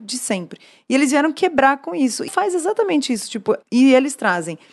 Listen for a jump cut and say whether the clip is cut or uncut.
cut